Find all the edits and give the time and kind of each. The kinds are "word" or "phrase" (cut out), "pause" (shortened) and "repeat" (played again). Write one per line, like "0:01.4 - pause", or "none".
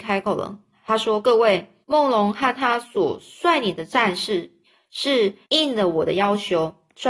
0:01.8 - pause
0:05.4 - pause

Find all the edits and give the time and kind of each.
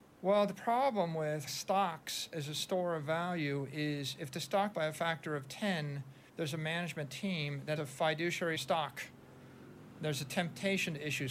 0:01.5 - word
0:04.7 - phrase
0:06.3 - pause
0:07.8 - word
0:08.5 - phrase

